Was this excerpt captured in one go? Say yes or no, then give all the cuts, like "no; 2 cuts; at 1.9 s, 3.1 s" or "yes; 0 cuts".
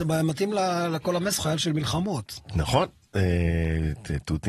no; 2 cuts; at 1.4 s, 2.4 s